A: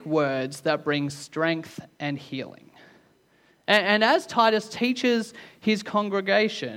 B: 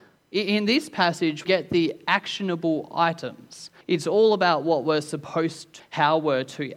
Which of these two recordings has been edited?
B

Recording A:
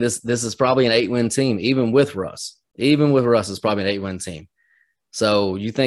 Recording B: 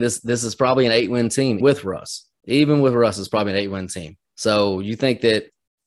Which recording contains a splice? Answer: B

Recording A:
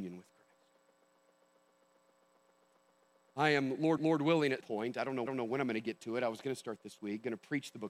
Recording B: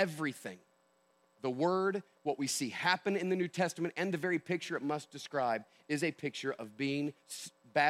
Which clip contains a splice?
A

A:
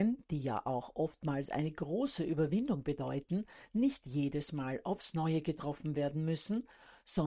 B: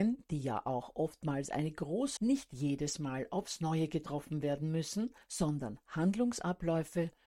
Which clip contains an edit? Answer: B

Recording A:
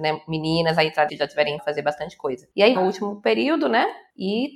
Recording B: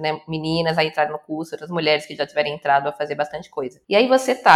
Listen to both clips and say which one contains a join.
A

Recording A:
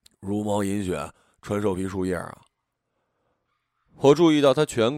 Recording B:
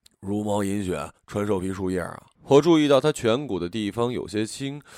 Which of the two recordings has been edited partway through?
B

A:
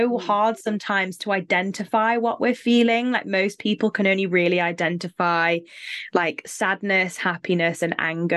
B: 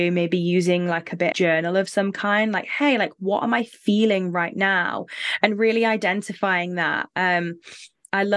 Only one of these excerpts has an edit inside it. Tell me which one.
B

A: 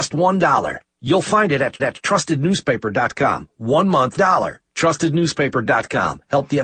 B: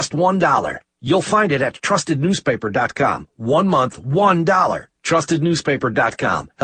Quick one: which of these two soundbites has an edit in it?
A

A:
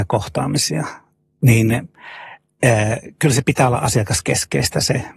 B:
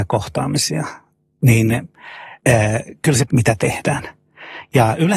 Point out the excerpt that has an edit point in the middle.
B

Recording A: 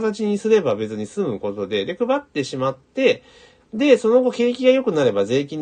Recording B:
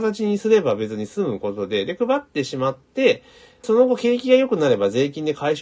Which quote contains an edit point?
B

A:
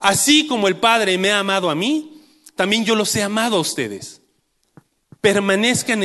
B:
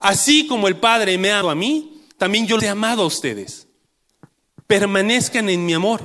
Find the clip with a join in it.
B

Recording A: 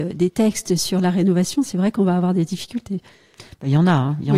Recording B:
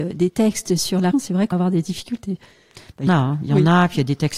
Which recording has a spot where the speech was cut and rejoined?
B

